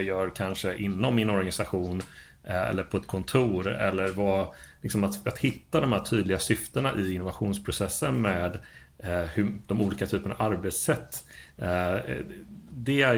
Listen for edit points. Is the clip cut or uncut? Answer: uncut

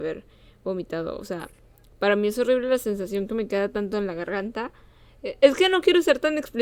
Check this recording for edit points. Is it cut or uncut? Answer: uncut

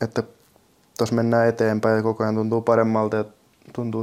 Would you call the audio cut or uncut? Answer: uncut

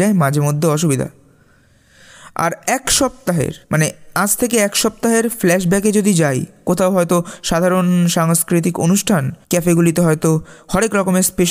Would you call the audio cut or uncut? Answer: cut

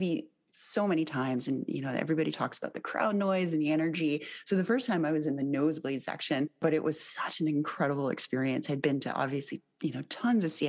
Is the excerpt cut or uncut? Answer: uncut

